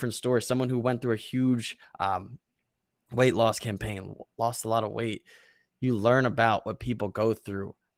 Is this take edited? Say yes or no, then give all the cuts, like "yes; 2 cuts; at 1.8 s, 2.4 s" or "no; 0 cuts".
no; 0 cuts